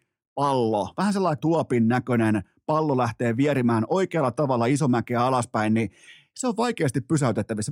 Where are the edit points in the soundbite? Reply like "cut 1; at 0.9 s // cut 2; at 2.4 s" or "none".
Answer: cut 1; at 1.4 s